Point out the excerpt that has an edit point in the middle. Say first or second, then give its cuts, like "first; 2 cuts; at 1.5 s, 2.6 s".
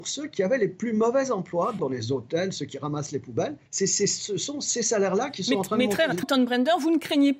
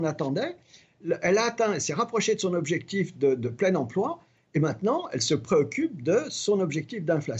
first; 3 cuts; at 1.8 s, 3.7 s, 6.2 s